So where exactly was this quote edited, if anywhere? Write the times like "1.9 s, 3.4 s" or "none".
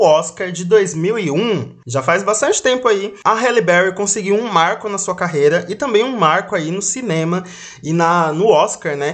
none